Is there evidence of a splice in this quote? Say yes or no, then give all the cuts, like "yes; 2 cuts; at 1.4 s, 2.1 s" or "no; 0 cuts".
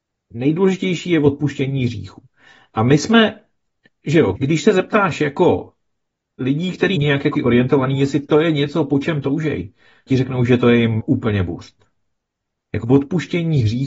yes; 6 cuts; at 4.3 s, 6.9 s, 7.3 s, 10.1 s, 11.0 s, 12.8 s